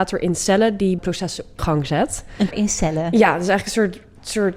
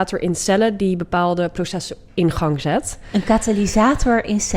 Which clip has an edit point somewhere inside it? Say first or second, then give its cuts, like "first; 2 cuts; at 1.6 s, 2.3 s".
first; 3 cuts; at 1.0 s, 1.6 s, 2.5 s